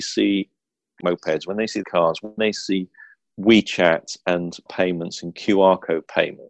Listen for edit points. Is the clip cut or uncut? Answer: cut